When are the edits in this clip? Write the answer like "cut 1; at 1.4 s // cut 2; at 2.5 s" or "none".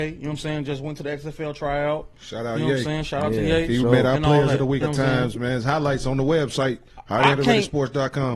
cut 1; at 4.8 s

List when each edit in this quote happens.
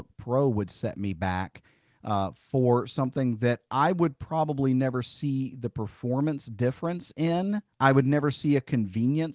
cut 1; at 7.7 s

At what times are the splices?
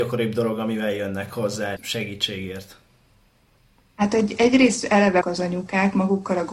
cut 1; at 1.8 s // cut 2; at 5.2 s

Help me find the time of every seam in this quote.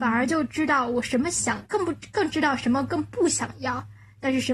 cut 1; at 1.7 s

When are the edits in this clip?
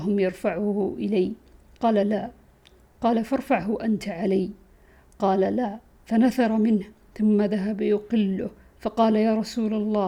none

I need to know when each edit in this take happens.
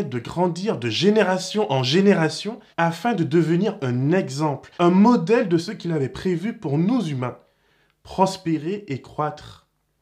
cut 1; at 2.7 s // cut 2; at 4.8 s

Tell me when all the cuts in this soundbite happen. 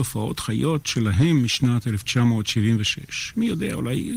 none

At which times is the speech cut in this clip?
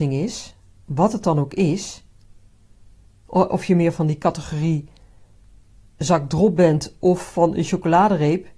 none

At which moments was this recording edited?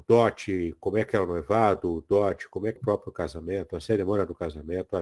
cut 1; at 2.8 s

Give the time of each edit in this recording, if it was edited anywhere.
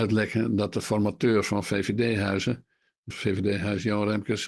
cut 1; at 3.1 s

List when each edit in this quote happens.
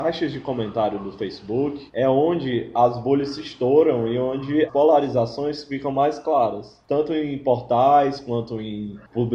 cut 1; at 1.9 s // cut 2; at 4.7 s

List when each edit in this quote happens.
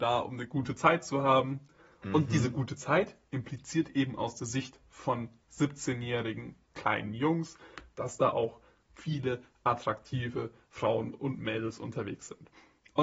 none

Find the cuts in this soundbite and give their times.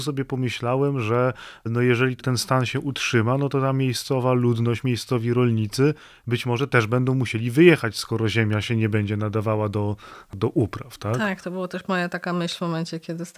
none

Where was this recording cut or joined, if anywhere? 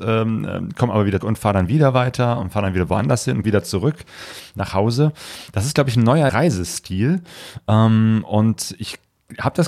cut 1; at 1.2 s // cut 2; at 3.4 s // cut 3; at 6.3 s

